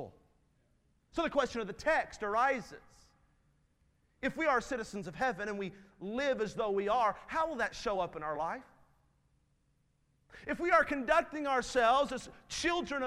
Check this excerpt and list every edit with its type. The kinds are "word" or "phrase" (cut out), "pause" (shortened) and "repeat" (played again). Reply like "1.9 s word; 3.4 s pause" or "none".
none